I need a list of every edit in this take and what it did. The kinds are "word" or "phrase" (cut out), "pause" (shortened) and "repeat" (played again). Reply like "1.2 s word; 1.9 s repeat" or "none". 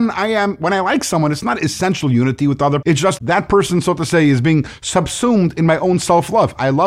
2.8 s word; 3.2 s word